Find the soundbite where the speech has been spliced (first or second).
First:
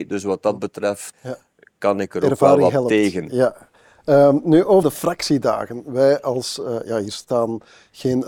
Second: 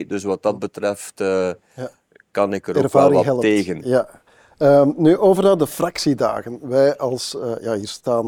first